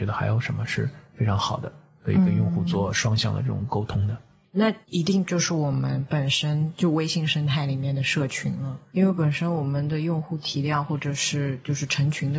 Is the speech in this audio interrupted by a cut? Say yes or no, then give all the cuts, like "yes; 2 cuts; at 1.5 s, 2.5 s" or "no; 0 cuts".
yes; 2 cuts; at 4.8 s, 8.9 s